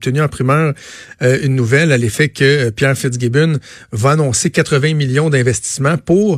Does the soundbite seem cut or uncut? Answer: uncut